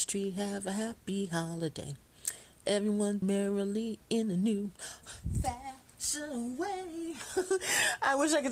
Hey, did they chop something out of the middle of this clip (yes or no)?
yes